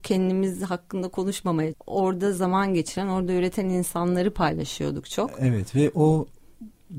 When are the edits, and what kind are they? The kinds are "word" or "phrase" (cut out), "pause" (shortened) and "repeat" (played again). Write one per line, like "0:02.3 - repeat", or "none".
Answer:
0:01.7 - word